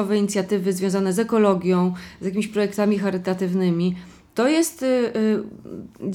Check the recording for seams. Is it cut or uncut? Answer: uncut